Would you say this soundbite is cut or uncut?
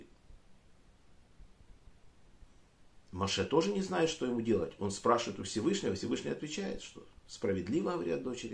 uncut